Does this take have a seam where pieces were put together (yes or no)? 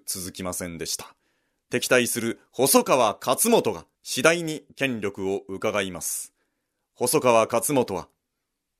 yes